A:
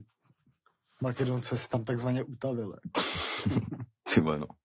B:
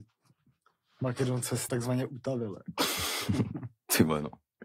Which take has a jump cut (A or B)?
B